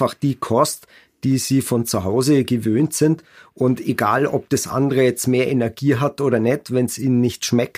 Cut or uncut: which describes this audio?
uncut